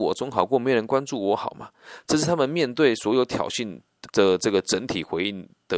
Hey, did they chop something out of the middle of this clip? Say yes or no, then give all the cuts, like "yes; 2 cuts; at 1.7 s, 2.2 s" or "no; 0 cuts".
yes; 1 cut; at 4.1 s